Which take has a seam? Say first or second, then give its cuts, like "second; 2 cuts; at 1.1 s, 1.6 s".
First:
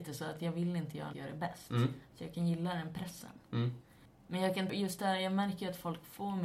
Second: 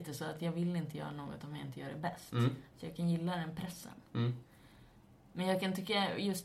first; 3 cuts; at 1.1 s, 4.1 s, 4.7 s